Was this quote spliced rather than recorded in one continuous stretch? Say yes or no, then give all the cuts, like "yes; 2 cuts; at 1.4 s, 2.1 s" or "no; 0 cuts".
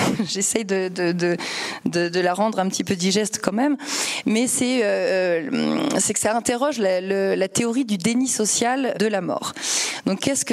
yes; 1 cut; at 8.9 s